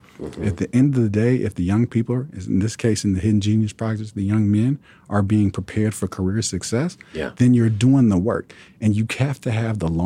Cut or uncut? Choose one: uncut